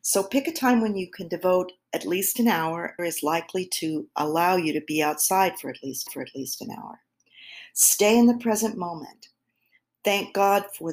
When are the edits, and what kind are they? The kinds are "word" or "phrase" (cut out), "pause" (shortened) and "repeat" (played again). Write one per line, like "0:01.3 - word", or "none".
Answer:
0:03.0 - phrase
0:06.1 - repeat